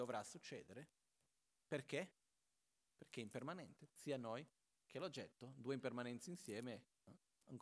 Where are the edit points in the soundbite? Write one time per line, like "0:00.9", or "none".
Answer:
none